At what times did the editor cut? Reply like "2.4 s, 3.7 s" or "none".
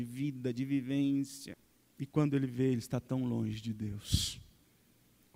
none

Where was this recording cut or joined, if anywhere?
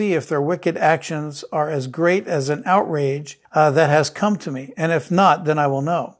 3.4 s

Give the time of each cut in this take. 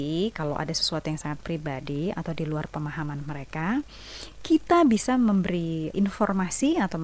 5.9 s

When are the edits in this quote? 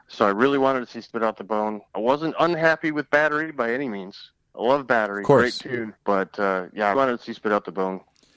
1.9 s, 6.0 s, 6.9 s

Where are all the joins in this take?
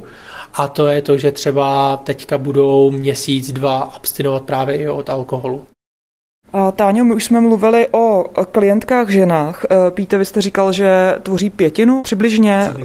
none

